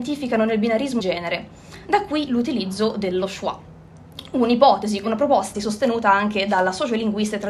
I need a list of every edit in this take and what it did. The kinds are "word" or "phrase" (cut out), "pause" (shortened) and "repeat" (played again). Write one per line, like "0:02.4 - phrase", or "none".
0:01.0 - word
0:02.3 - word
0:05.0 - word
0:05.5 - word